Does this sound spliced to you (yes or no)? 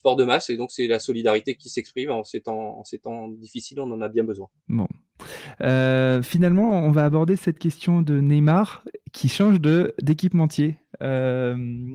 yes